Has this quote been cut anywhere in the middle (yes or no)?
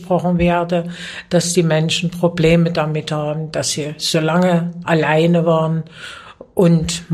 no